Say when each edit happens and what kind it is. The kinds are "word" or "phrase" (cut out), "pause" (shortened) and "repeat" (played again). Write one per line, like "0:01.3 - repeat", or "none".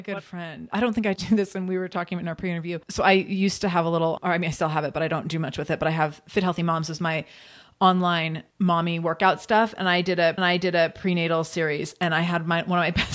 0:01.2 - word
0:02.8 - pause
0:08.5 - pause
0:10.4 - repeat